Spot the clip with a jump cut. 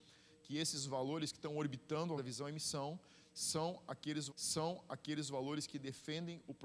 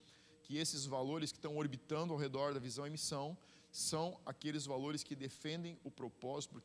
first; 2 cuts; at 2.2 s, 4.3 s

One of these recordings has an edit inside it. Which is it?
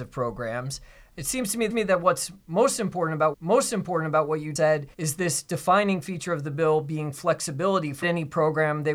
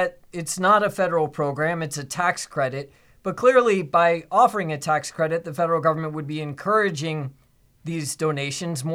first; 5 cuts; at 1.7 s, 3.3 s, 4.6 s, 4.9 s, 8.0 s

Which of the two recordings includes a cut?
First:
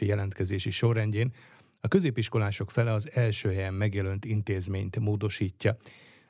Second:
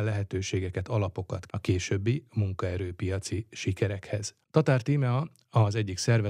second; 1 cut; at 1.5 s

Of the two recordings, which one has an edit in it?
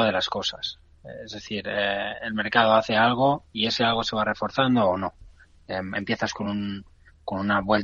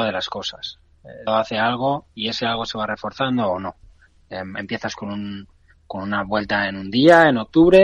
second; 1 cut; at 1.3 s

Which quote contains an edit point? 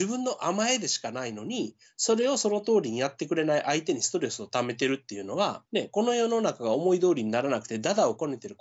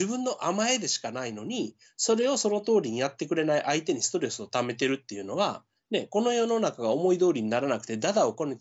first; 1 cut; at 5.7 s

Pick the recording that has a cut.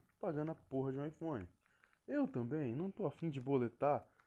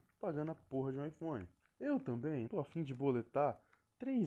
second; 2 cuts; at 1.6 s, 2.5 s

